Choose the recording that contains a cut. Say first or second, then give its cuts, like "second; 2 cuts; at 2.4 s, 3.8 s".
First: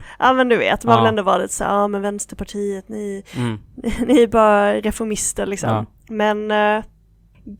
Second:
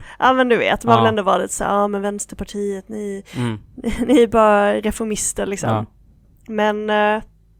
first; 1 cut; at 6.0 s